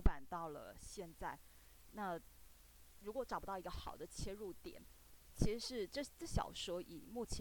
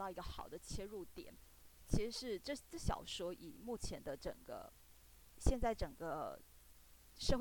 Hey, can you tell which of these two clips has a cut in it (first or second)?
second